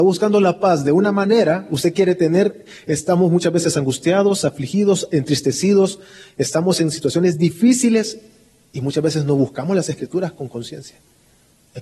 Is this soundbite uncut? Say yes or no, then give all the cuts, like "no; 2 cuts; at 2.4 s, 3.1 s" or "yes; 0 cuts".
yes; 0 cuts